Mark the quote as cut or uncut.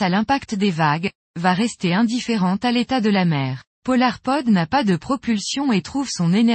cut